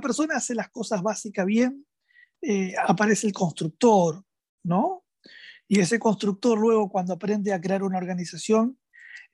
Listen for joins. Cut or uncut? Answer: uncut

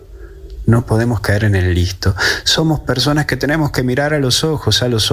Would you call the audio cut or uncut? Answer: uncut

